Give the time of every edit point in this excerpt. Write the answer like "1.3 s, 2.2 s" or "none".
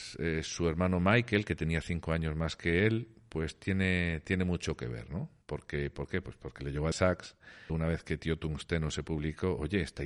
5.4 s, 6.9 s, 7.7 s